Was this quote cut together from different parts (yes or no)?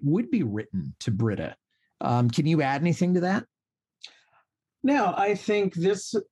no